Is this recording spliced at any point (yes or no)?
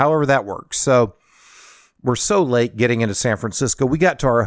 no